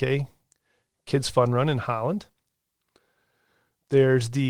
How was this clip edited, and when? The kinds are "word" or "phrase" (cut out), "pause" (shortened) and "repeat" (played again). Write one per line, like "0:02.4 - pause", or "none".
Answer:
none

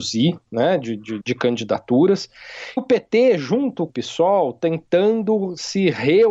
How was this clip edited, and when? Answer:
0:01.2 - word
0:02.8 - word
0:03.9 - phrase

